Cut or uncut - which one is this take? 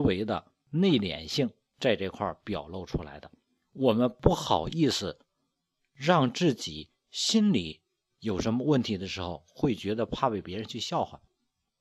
uncut